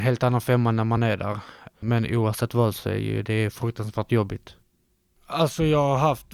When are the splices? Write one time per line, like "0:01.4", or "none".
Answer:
none